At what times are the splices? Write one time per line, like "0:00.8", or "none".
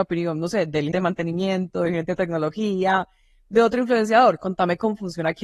0:00.9